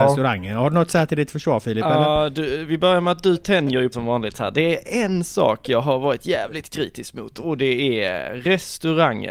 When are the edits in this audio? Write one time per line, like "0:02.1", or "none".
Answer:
0:03.9

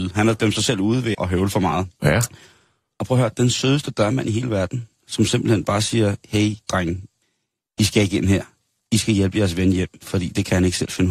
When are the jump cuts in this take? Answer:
0:01.1
0:02.0
0:07.2

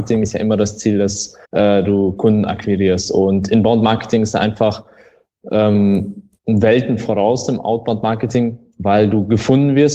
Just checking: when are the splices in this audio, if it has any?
0:01.4
0:06.4

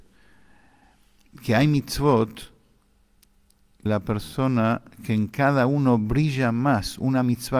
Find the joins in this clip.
0:03.9

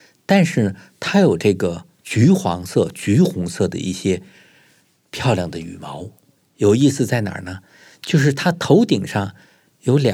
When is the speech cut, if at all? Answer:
none

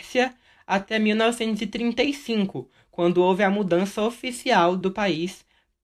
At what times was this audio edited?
0:04.8

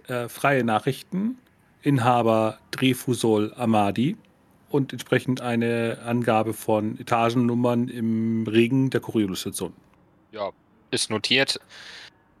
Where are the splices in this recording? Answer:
none

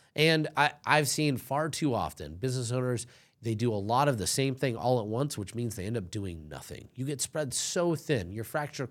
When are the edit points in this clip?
none

